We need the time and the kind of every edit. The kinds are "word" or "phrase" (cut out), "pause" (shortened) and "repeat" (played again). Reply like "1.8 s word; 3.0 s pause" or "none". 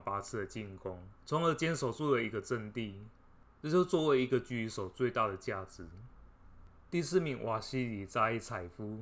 1.2 s pause; 6.8 s pause